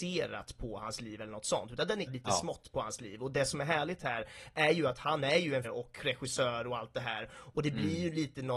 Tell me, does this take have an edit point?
yes; 2 cuts; at 2.1 s, 5.6 s

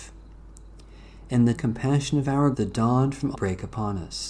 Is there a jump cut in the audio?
yes; 3 cuts; at 1.5 s, 2.5 s, 3.3 s

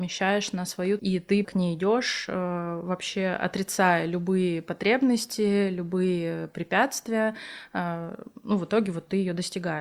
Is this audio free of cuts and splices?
no; 2 cuts; at 1.0 s, 1.4 s

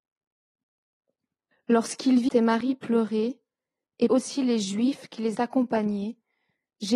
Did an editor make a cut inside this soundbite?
yes; 3 cuts; at 2.3 s, 4.1 s, 5.3 s

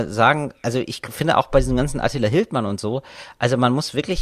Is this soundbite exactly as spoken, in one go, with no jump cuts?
yes; 0 cuts

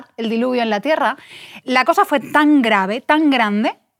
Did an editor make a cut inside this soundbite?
no; 0 cuts

